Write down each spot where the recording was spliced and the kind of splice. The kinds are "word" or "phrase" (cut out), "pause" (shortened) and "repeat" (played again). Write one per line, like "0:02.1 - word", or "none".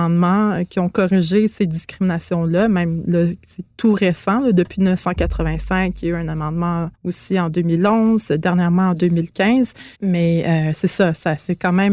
0:06.9 - pause
0:09.9 - pause